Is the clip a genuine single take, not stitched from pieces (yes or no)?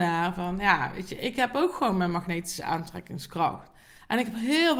yes